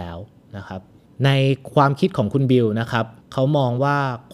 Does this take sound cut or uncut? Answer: cut